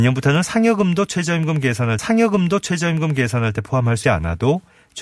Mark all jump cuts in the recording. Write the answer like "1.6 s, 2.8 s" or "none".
2.0 s, 4.0 s